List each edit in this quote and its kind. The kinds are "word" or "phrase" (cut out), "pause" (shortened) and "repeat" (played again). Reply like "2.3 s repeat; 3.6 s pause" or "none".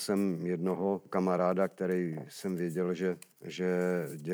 none